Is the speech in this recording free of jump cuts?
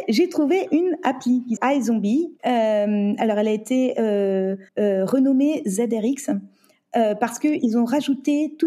no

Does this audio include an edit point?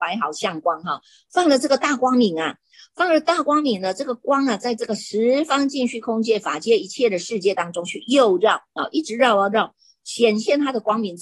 no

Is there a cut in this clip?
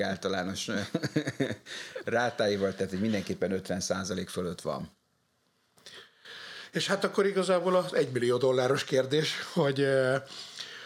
no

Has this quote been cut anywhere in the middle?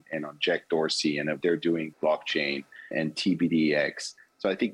yes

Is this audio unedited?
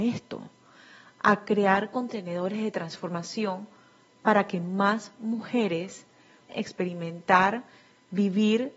no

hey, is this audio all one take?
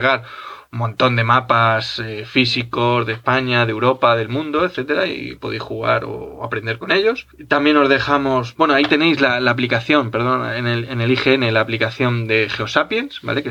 yes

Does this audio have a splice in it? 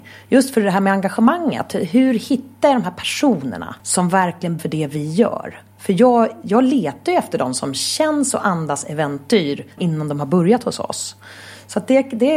yes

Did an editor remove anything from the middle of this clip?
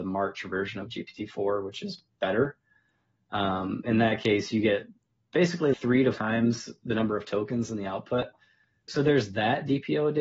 yes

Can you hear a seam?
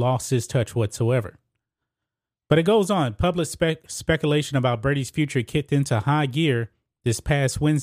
no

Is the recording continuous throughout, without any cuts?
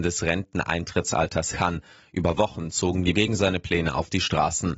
no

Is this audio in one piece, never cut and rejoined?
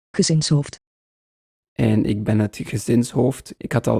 yes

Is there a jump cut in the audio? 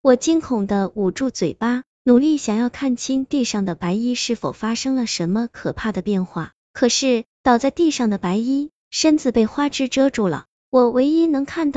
yes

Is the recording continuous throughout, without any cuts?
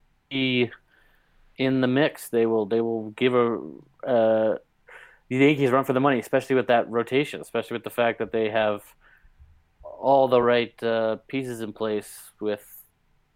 yes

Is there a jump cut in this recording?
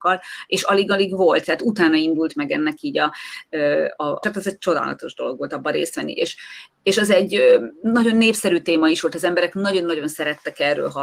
yes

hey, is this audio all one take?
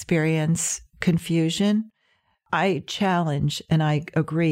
yes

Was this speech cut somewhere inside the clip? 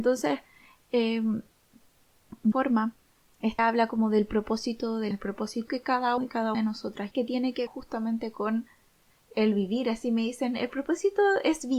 yes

